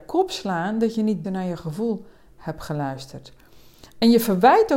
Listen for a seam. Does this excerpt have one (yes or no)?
yes